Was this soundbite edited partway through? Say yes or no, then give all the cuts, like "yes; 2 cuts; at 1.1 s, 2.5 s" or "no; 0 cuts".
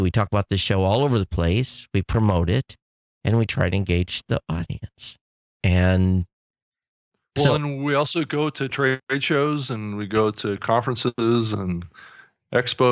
no; 0 cuts